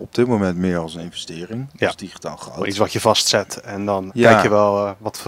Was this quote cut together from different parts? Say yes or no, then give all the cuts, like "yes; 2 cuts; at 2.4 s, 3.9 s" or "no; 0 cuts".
yes; 1 cut; at 4.1 s